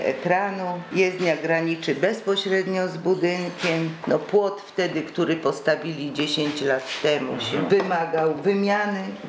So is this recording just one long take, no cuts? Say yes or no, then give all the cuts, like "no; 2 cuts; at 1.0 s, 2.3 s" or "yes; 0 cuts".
yes; 0 cuts